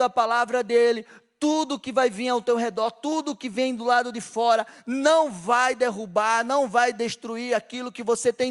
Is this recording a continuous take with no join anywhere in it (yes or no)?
yes